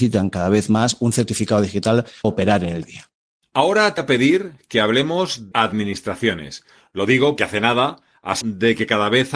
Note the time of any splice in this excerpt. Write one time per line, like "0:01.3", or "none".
0:02.2
0:02.8
0:04.0
0:05.5
0:07.4
0:08.4